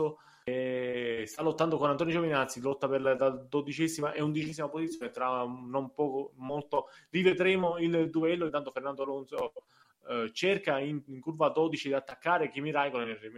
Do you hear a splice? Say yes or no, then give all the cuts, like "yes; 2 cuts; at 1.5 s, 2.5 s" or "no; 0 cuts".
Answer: no; 0 cuts